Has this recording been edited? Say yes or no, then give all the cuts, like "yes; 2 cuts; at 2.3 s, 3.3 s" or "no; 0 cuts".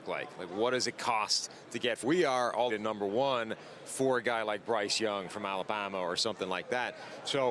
yes; 2 cuts; at 2.0 s, 2.7 s